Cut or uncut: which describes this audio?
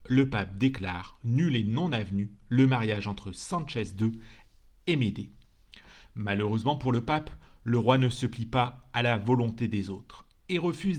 uncut